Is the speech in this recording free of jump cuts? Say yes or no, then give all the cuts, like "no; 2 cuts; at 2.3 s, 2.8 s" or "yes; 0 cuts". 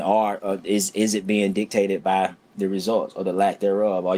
yes; 0 cuts